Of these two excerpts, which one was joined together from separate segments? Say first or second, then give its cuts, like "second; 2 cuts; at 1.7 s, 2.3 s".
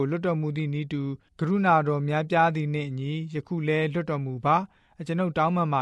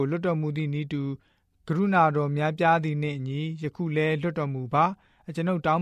first; 1 cut; at 1.3 s